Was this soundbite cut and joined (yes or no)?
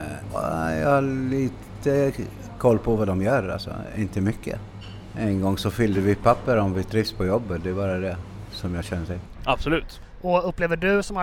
no